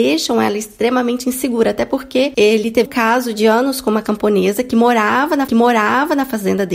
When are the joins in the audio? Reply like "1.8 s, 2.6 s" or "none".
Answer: 2.9 s, 5.5 s